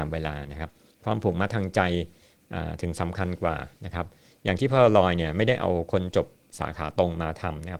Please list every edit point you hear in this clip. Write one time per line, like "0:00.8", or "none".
none